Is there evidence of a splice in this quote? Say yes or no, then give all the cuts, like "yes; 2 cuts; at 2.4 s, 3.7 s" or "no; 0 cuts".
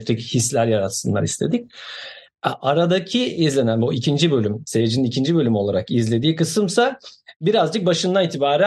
no; 0 cuts